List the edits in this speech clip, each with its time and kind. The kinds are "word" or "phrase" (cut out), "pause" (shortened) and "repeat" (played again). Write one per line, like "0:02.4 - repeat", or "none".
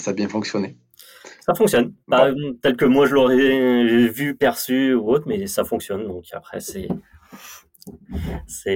0:02.0 - pause